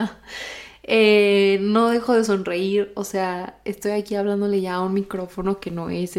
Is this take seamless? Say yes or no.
yes